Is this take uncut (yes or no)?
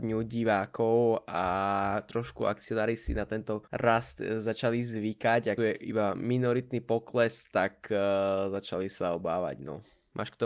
no